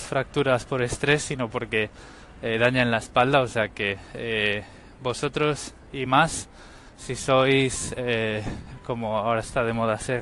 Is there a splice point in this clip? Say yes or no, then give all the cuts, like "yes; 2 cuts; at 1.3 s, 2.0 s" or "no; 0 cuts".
no; 0 cuts